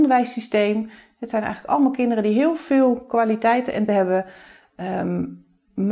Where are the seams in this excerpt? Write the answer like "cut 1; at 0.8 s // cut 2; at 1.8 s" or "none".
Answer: cut 1; at 3.9 s